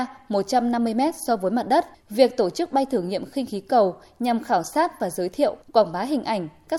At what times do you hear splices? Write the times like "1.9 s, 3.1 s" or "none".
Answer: 1.9 s, 5.6 s

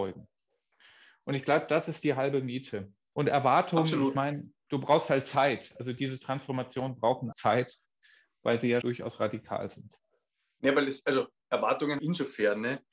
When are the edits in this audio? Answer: 7.3 s, 8.8 s, 12.0 s

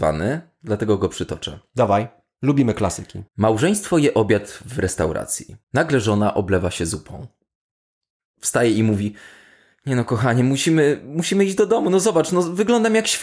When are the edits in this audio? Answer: 3.3 s, 5.6 s

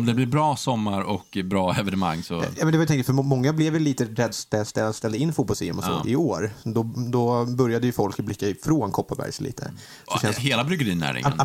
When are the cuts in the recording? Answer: 2.9 s, 4.3 s, 10.4 s

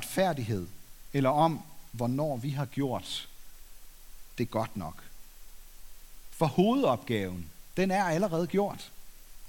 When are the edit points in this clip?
none

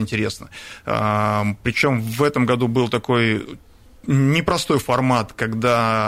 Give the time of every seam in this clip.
none

